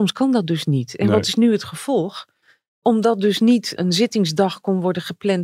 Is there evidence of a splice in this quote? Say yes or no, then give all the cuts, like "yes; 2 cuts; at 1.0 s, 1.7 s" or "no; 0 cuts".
yes; 1 cut; at 3.8 s